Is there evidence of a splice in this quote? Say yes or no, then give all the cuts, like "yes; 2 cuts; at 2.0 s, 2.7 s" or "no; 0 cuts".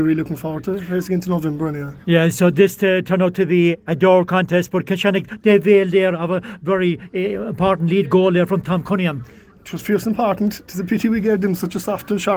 no; 0 cuts